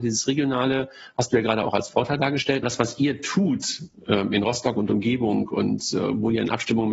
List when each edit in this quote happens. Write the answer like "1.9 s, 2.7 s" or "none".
2.6 s